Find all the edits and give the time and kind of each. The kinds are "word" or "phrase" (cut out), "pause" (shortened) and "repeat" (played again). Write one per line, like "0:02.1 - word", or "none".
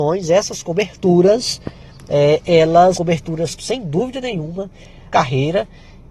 0:02.9 - word
0:03.6 - word
0:05.1 - phrase